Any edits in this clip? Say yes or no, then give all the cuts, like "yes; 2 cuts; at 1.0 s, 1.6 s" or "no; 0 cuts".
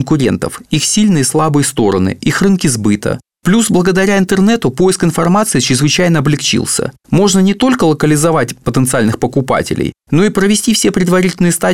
yes; 1 cut; at 7.0 s